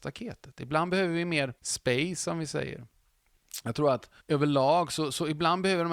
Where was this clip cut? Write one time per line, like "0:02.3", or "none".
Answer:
0:01.6
0:04.2